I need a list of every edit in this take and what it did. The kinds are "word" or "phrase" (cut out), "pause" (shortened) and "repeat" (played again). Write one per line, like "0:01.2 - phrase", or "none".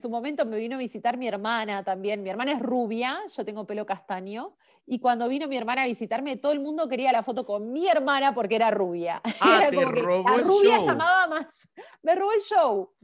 0:04.7 - pause